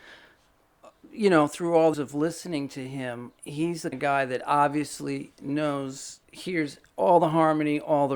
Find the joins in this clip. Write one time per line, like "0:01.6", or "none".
0:01.9
0:03.4
0:03.9
0:06.2